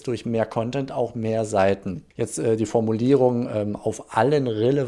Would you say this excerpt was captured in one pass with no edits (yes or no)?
no